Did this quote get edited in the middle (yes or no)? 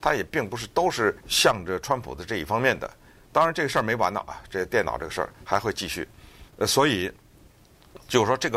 yes